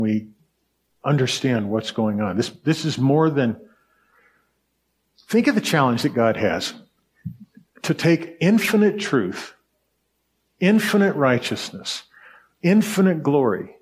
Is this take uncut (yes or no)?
yes